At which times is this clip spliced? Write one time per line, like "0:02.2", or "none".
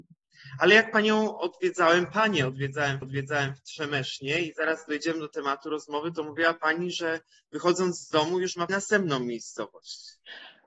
0:03.0
0:08.7

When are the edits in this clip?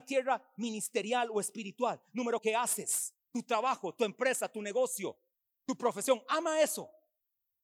0:02.4
0:05.3

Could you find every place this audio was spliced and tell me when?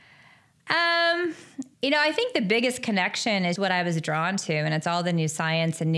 0:01.7
0:03.6

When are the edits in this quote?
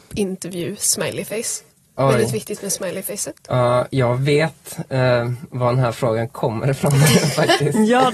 none

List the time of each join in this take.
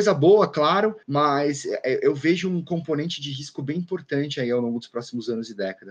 0:01.0

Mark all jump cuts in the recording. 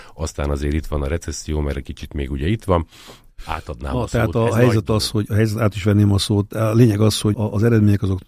0:03.3
0:07.3

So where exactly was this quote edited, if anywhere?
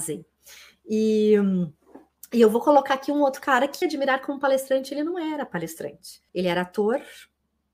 0:03.8
0:06.3

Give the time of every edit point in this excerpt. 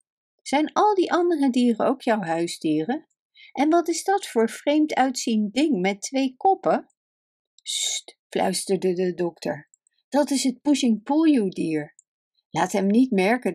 none

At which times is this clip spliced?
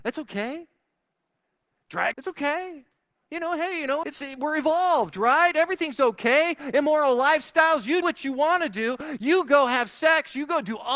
0:02.1
0:04.0
0:08.0

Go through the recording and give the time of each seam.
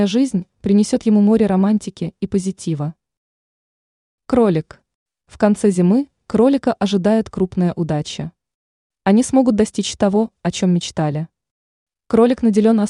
none

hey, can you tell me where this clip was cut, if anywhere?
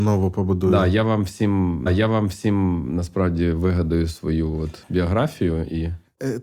0:01.9

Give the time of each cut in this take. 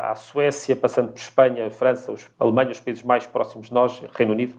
0:02.3

